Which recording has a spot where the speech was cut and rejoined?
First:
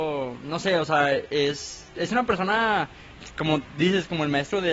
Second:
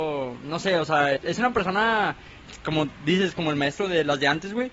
second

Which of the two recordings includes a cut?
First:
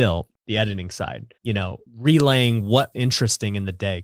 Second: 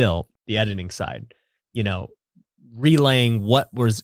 first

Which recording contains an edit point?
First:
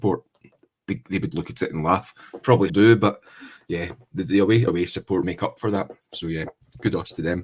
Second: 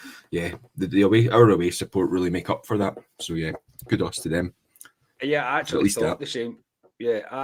first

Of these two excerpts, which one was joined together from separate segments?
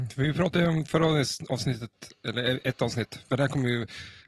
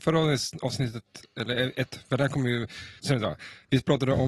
second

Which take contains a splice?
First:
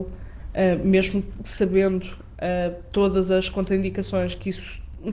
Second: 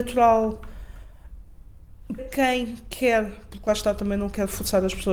second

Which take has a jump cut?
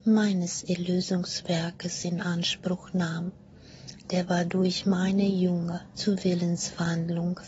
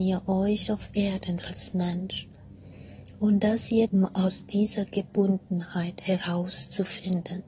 second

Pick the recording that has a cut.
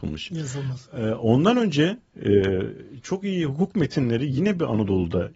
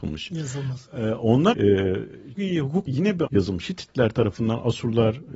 second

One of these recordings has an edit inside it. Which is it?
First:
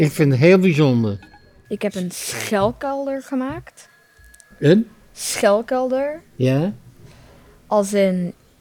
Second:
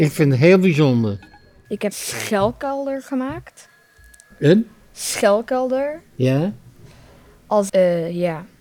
second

